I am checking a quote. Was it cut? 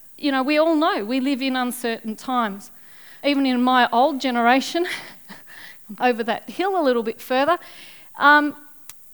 yes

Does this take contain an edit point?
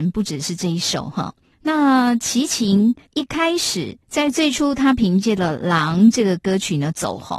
yes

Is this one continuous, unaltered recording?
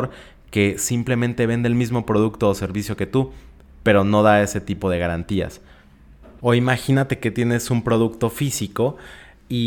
yes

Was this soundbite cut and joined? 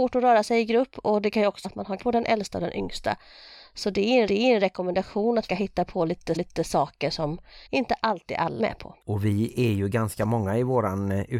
yes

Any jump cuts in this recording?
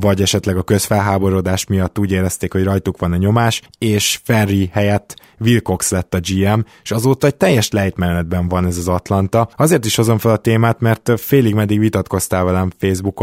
yes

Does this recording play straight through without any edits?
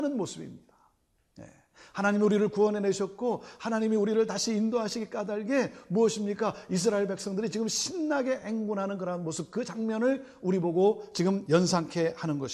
yes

